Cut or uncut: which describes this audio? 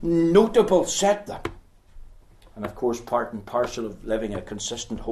cut